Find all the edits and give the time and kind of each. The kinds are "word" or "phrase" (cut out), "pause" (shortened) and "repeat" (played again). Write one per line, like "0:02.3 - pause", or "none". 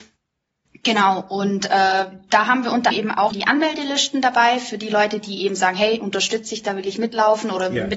0:02.9 - word
0:03.3 - word